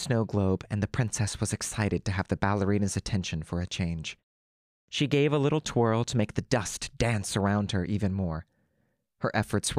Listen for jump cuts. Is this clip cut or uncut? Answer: uncut